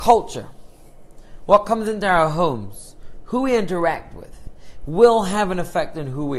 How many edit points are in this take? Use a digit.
0